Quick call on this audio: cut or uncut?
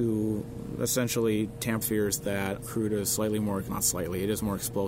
cut